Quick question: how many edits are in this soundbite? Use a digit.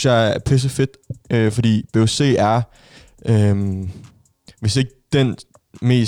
0